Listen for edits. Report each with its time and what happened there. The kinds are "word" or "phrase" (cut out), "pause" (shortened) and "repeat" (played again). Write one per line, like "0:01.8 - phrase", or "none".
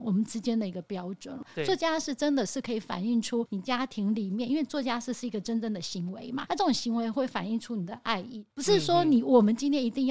0:06.5 - word
0:08.5 - pause